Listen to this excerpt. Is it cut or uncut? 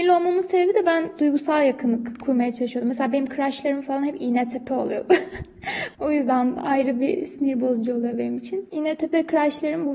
uncut